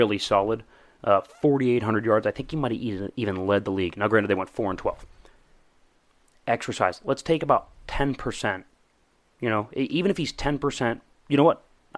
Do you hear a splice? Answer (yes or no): no